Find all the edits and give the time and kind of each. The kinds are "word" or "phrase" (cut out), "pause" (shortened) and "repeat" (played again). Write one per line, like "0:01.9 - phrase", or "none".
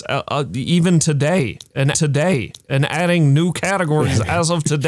0:01.9 - repeat